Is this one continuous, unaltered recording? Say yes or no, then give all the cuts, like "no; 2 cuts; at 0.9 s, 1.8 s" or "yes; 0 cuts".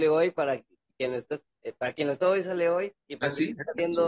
no; 2 cuts; at 2.2 s, 3.0 s